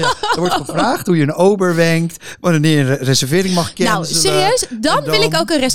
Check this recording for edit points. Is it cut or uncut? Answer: uncut